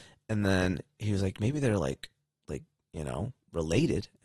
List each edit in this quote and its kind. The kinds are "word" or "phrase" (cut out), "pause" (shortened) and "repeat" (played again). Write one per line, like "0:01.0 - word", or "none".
none